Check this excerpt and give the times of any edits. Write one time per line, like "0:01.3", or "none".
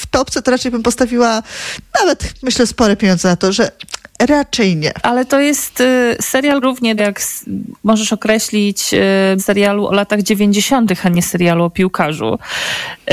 0:06.6
0:07.0
0:09.4